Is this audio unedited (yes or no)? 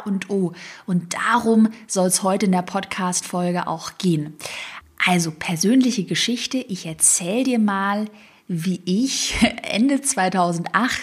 yes